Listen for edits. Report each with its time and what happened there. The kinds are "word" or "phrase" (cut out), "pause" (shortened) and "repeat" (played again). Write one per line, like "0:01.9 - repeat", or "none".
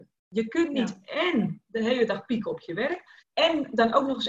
0:03.2 - pause